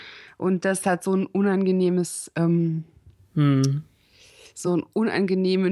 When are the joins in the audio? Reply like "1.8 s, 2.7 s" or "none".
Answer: none

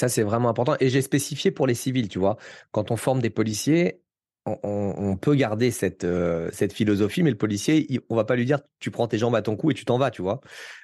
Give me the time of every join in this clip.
none

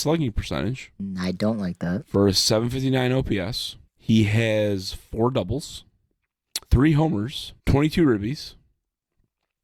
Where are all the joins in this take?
3.9 s, 6.6 s, 7.6 s

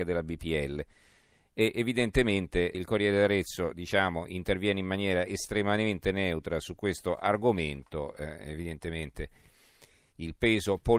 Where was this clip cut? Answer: 2.7 s

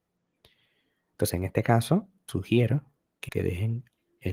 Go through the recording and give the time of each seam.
2.3 s, 3.3 s

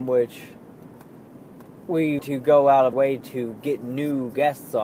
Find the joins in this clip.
2.2 s, 2.9 s

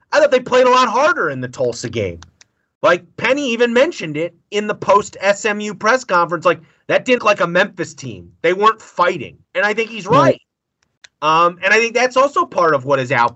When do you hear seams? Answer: 7.2 s, 9.4 s

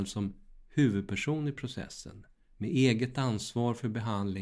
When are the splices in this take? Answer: none

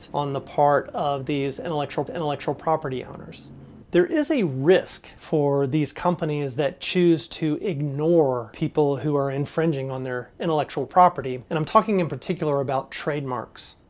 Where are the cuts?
2.1 s

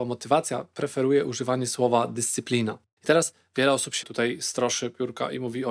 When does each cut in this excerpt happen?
4.0 s

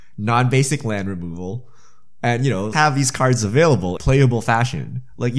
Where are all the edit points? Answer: 2.7 s, 4.0 s

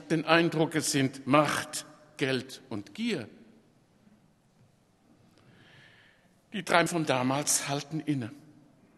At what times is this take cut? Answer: 6.9 s

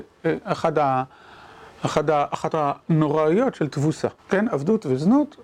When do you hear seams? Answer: 2.5 s, 4.2 s

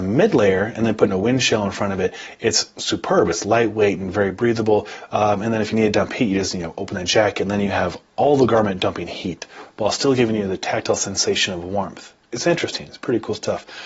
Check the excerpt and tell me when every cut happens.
8.1 s, 12.2 s

